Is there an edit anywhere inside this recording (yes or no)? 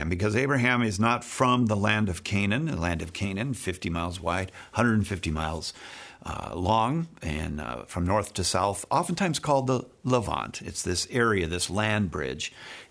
no